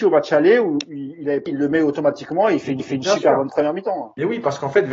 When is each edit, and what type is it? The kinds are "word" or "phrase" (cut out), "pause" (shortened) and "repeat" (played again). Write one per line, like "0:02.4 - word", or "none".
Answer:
0:01.5 - word
0:02.8 - repeat